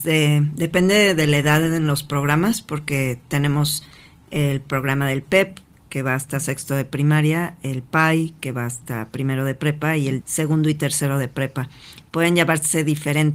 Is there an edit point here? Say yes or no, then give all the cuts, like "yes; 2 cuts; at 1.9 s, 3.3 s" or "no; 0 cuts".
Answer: yes; 1 cut; at 10.2 s